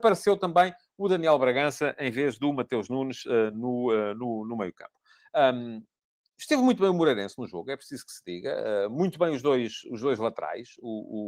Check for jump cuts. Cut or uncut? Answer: uncut